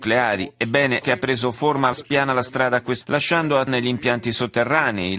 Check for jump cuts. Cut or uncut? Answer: cut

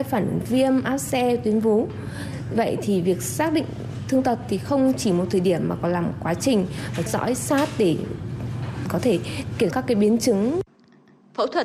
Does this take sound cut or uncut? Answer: cut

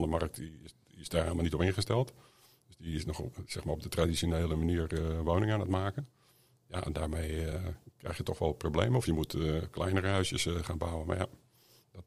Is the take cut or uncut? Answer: uncut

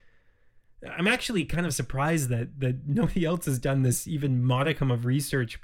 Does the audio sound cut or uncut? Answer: uncut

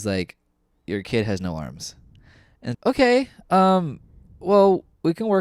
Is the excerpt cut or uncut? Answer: cut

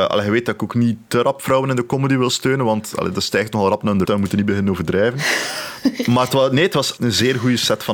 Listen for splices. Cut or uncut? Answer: cut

